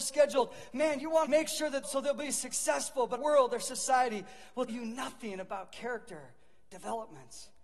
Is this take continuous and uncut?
no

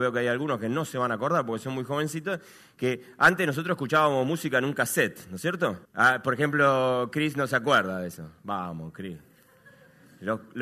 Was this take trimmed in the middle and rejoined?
yes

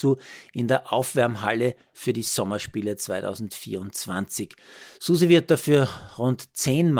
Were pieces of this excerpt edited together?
no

